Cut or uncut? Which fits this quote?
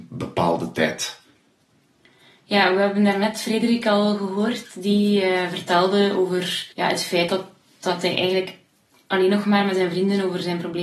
cut